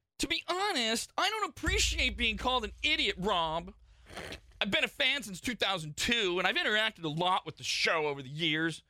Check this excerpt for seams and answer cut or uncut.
uncut